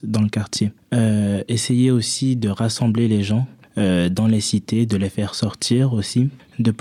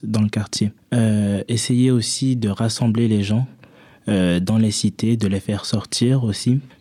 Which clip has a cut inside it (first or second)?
first